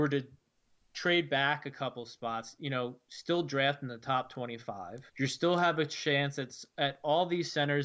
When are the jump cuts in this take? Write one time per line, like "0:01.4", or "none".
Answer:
0:05.1